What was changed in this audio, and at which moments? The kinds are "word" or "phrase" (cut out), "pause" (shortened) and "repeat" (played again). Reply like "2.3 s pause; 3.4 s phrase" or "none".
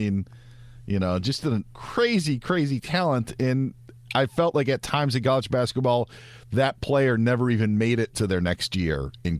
1.7 s word